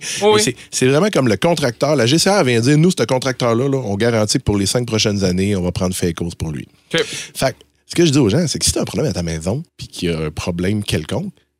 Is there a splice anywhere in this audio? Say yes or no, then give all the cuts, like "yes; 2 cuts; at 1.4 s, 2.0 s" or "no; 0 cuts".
yes; 1 cut; at 9.7 s